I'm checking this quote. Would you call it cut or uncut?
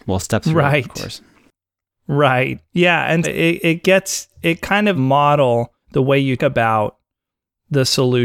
cut